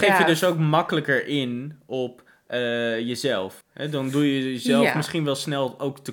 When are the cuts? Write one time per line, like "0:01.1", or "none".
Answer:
0:03.6